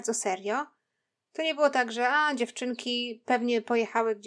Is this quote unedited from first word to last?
yes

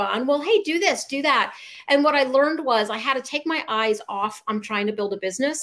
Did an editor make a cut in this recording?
no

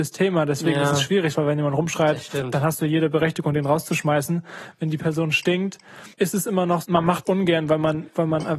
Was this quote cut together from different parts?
yes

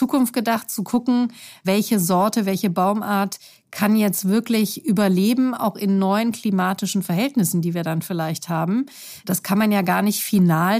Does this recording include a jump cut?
no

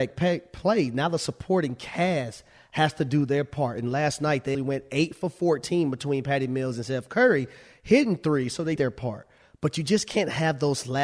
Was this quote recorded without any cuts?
no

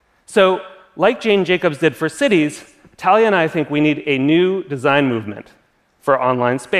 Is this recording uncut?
yes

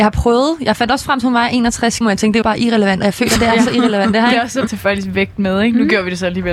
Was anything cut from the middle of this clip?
yes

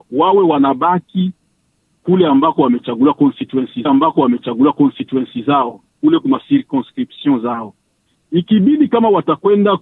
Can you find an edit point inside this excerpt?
yes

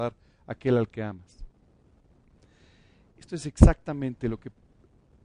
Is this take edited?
no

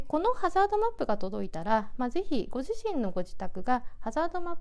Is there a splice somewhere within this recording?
no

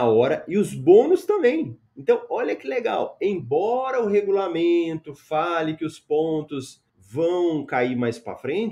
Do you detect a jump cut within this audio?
yes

